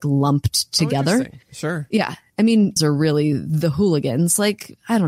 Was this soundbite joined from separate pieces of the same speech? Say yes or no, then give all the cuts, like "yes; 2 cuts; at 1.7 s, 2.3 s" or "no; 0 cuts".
yes; 2 cuts; at 1.4 s, 2.8 s